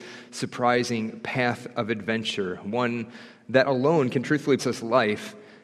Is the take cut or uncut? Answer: cut